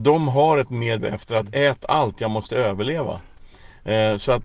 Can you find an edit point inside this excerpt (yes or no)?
yes